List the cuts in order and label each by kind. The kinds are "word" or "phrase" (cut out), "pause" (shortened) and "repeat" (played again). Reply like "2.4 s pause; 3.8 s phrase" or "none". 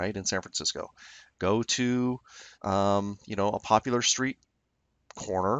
2.5 s pause